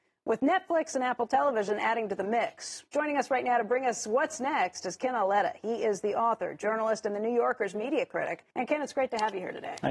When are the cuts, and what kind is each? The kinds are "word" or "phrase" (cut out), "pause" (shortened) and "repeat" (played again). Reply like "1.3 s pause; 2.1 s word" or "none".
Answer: 8.5 s pause